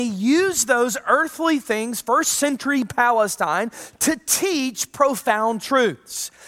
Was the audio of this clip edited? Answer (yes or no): no